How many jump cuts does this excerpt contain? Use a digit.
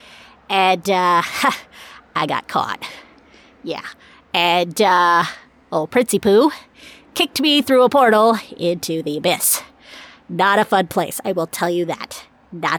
0